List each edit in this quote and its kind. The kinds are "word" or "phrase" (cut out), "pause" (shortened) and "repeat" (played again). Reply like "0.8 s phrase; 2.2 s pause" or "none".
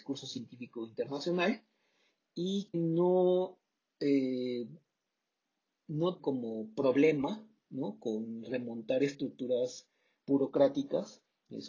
2.7 s word; 6.2 s word